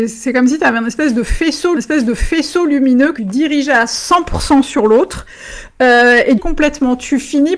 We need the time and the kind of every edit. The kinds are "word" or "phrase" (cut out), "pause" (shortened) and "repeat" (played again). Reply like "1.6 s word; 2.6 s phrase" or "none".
1.8 s repeat; 3.2 s word; 6.4 s phrase

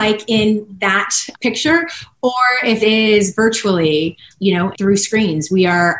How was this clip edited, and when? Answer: 1.3 s word; 2.8 s word; 4.3 s word; 4.7 s word

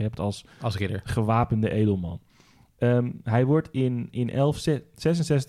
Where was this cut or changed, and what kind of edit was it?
none

